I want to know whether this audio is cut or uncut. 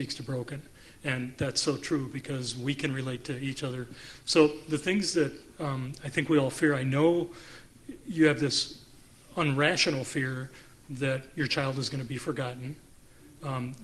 uncut